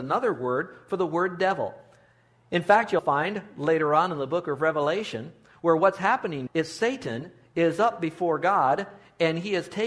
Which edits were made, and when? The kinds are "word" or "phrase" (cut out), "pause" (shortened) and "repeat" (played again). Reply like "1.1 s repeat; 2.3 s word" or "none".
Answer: 3.0 s word; 6.5 s word